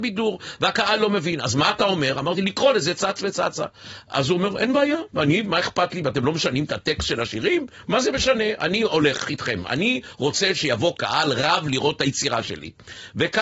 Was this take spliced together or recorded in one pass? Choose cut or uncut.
uncut